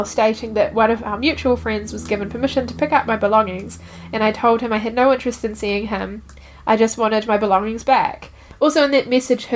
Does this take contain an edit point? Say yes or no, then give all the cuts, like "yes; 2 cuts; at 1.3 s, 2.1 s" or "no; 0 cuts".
no; 0 cuts